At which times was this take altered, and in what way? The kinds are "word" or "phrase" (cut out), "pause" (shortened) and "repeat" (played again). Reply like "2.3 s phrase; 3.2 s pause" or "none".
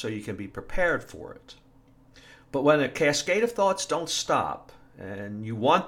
none

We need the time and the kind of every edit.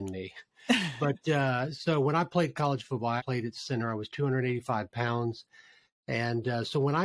3.2 s word

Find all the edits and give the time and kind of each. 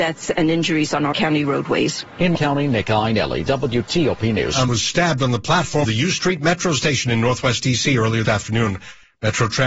1.1 s word; 2.3 s word; 4.7 s word; 5.8 s word; 8.2 s word

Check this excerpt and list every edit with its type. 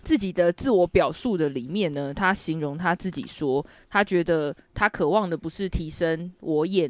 none

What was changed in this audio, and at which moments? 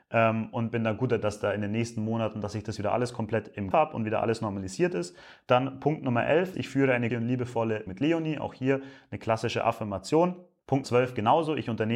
1.2 s word; 3.7 s word; 6.5 s word; 7.1 s word; 7.9 s word; 10.8 s word

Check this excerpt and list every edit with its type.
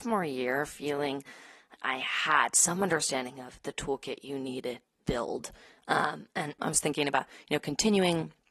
1.7 s word; 4.8 s word

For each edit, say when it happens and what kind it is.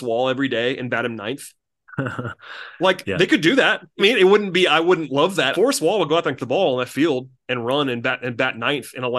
4.0 s phrase; 5.5 s phrase; 6.4 s word

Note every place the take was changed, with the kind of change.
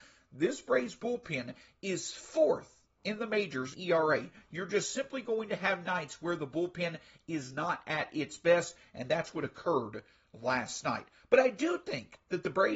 3.7 s phrase

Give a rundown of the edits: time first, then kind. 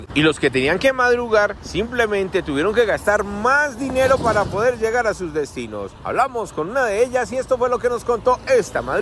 none

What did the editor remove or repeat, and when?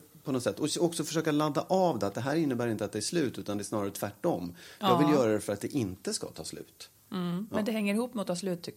none

